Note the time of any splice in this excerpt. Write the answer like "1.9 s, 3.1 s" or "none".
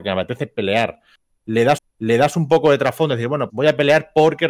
1.8 s, 3.5 s